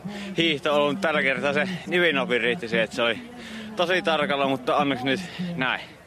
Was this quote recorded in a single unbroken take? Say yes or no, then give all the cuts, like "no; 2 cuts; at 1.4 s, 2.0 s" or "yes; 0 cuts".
yes; 0 cuts